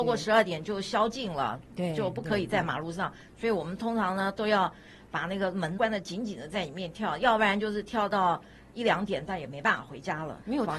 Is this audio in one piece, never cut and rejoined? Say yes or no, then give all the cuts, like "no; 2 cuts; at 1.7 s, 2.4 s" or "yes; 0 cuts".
no; 1 cut; at 5.8 s